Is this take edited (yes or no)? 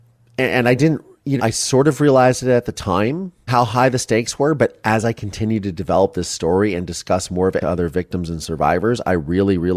yes